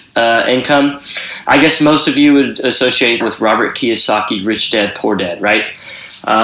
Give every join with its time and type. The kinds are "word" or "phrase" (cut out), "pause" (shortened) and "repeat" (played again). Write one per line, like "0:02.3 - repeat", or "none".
0:03.2 - word

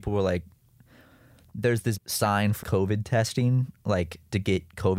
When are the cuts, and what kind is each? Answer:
0:02.0 - word
0:02.6 - word

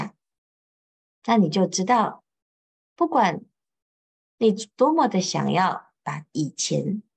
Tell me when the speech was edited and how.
none

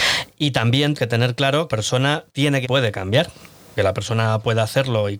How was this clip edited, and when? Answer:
0:00.9 - word
0:01.7 - word
0:02.3 - pause
0:02.6 - phrase
0:03.8 - word

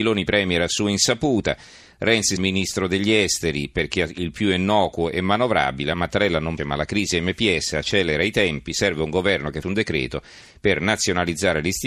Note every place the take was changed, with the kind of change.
0:02.4 - word
0:05.9 - word
0:06.6 - word
0:09.6 - word

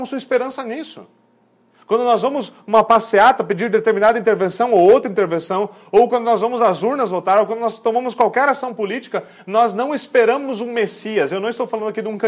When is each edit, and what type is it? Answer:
0:01.7 - pause

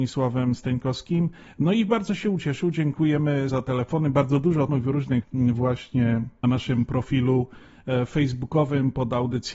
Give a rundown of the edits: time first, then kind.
0:03.5 - word
0:04.7 - word
0:05.2 - word
0:06.4 - word

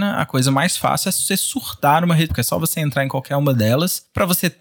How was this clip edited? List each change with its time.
0:02.3 - word

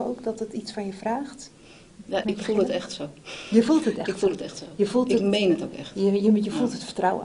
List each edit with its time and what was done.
0:02.2 - word

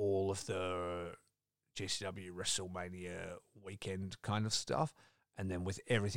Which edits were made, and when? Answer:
none

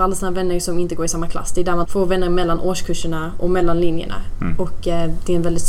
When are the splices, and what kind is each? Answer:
0:01.8 - word

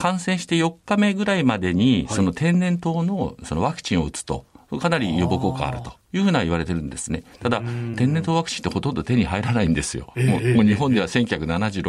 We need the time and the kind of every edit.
0:07.9 - word

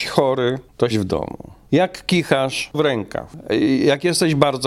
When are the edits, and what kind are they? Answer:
0:00.9 - word
0:02.7 - word

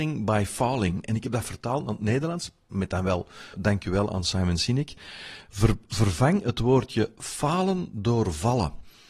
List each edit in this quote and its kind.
0:03.5 - word

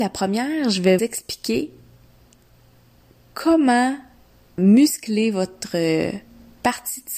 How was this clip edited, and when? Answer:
0:01.0 - word
0:04.6 - word

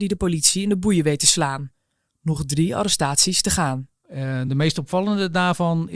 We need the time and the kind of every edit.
none

